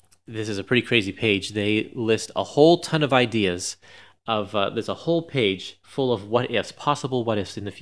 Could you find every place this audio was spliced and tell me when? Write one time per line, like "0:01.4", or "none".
none